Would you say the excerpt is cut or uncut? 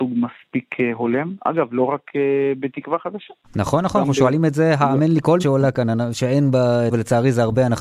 cut